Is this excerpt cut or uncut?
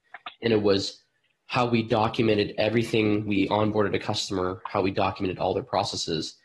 cut